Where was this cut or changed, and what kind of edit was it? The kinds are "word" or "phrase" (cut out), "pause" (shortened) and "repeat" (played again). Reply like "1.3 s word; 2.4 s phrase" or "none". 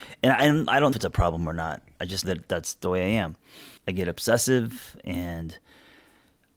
0.9 s phrase; 2.2 s word; 3.8 s pause